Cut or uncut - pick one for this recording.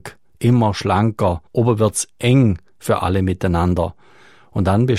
cut